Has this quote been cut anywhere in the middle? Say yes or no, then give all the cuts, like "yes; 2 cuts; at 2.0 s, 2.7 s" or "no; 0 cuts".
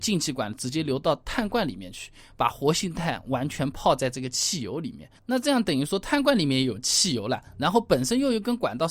yes; 1 cut; at 5.2 s